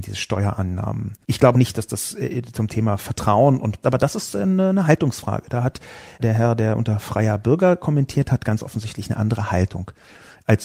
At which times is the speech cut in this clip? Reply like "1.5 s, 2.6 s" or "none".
1.2 s, 1.5 s, 3.8 s

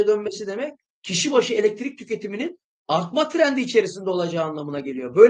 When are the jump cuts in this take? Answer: none

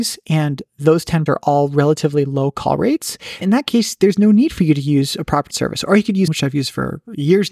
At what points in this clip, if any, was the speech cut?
1.3 s, 3.4 s, 5.5 s, 6.3 s

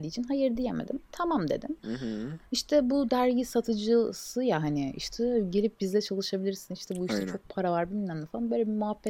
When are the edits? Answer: none

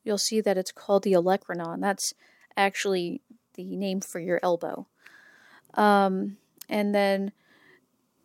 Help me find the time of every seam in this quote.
none

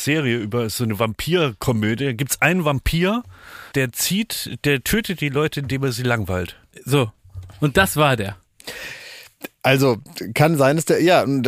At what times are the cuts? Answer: 3.7 s

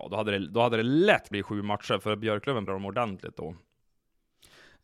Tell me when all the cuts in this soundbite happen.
1.3 s, 2.7 s

